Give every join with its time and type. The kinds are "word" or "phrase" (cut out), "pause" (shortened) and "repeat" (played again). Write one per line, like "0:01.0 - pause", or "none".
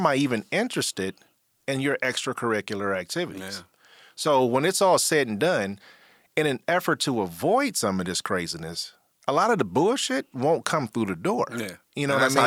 0:10.3 - word